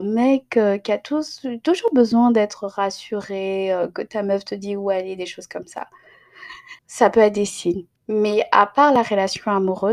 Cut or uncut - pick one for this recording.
cut